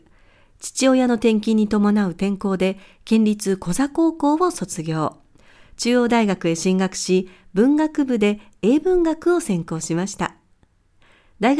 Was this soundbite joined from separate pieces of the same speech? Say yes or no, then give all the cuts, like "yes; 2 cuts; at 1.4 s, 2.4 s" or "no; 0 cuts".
no; 0 cuts